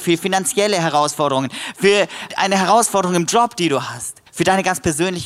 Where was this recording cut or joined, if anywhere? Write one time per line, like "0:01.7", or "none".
0:02.3
0:04.3

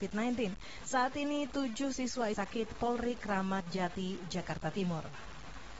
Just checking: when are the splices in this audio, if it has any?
0:02.3

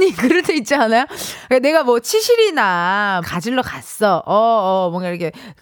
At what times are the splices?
0:03.2

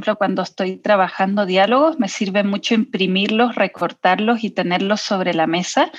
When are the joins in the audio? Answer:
none

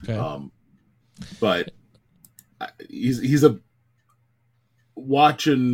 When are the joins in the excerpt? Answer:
none

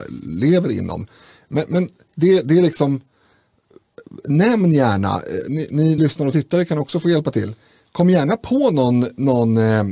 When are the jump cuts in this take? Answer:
0:06.0

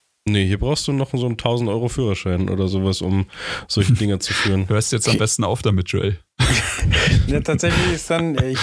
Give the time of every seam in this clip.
none

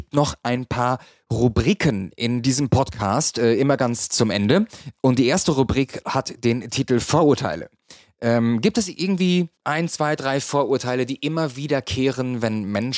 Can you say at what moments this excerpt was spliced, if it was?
0:09.5

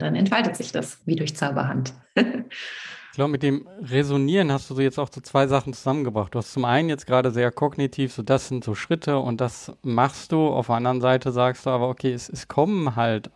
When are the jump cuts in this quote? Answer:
0:01.0

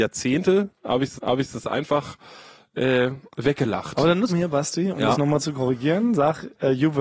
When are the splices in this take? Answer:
0:01.2
0:03.3
0:04.3

